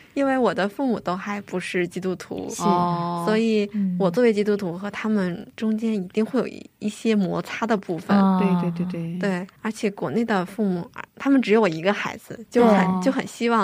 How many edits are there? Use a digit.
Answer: 2